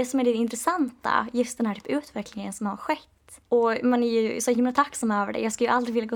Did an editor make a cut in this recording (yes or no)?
yes